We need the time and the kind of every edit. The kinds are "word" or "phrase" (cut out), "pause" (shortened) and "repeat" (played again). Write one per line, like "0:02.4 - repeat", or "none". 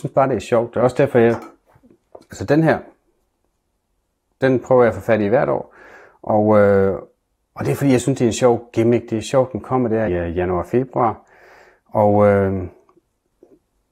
0:04.4 - word
0:10.1 - word